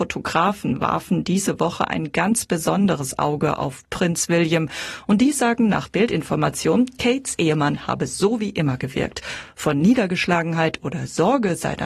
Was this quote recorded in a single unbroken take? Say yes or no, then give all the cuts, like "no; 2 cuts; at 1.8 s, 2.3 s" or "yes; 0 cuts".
yes; 0 cuts